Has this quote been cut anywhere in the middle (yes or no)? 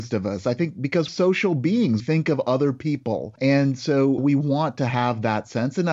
yes